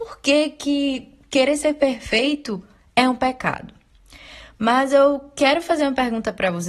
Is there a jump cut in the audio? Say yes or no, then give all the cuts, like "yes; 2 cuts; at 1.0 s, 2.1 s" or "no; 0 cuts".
no; 0 cuts